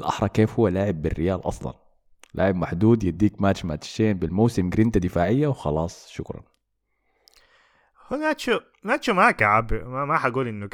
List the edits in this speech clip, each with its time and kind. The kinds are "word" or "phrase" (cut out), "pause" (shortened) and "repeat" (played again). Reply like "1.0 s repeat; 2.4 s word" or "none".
none